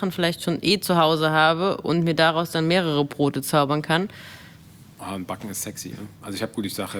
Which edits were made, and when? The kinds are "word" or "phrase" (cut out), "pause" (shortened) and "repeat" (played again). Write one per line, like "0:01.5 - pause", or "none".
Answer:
none